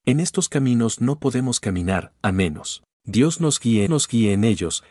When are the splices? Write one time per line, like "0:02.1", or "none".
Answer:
0:02.9
0:03.9